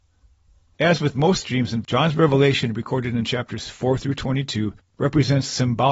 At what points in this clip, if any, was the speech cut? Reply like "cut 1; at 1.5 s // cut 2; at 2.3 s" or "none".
cut 1; at 1.8 s